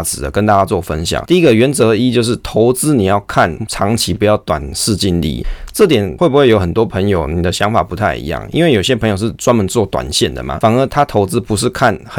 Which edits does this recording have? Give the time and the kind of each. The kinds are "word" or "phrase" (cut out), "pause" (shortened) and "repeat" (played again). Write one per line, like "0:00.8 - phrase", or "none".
none